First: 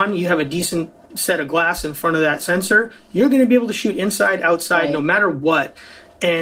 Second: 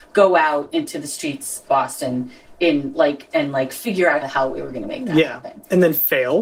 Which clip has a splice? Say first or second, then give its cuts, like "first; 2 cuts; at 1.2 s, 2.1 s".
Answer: second; 3 cuts; at 1.7 s, 3.3 s, 4.2 s